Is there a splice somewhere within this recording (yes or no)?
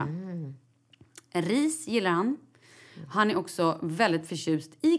no